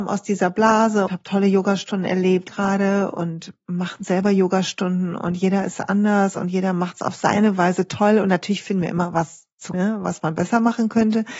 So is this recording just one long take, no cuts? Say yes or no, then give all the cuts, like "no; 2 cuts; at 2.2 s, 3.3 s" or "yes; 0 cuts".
no; 3 cuts; at 1.1 s, 2.5 s, 9.7 s